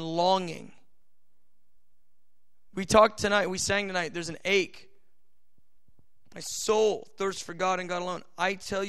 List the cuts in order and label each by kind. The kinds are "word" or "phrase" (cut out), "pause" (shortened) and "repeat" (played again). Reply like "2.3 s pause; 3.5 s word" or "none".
none